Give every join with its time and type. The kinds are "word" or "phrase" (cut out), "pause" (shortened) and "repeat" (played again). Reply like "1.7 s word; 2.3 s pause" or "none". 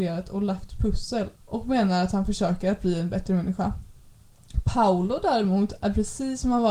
1.4 s pause

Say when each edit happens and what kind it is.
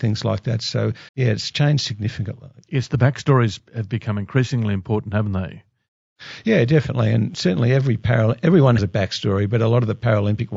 1.1 s pause; 8.8 s word

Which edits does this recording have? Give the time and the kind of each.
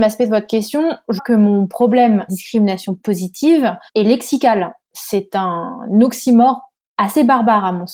1.2 s word; 2.3 s phrase; 3.9 s pause

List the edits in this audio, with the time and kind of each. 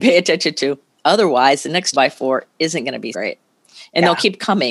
1.9 s word; 3.1 s word

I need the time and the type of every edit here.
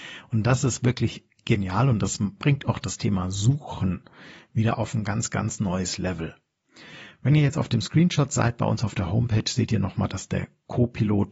none

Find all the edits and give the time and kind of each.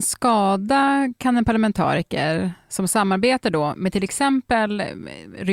none

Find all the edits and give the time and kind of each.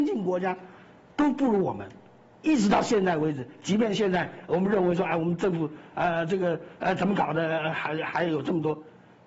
none

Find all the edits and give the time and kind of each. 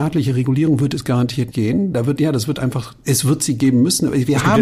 1.5 s word; 2.2 s word

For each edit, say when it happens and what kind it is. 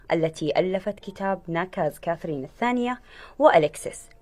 none

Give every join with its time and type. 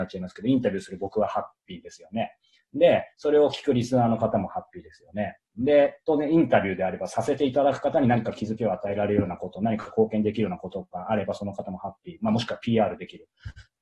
none

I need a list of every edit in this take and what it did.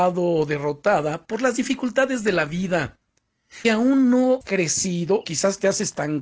3.6 s word; 4.4 s word; 5.2 s word

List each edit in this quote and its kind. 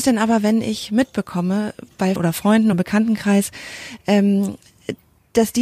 2.2 s word; 2.7 s word

